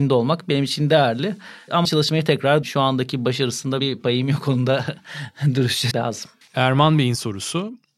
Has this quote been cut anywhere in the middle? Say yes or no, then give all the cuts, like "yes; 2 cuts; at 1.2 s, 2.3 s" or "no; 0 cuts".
yes; 5 cuts; at 1.8 s, 2.6 s, 3.8 s, 5.9 s, 6.4 s